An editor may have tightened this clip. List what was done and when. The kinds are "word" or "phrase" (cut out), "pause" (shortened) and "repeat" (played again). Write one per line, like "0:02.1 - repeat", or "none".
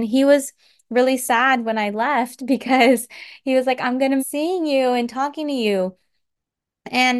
0:04.2 - word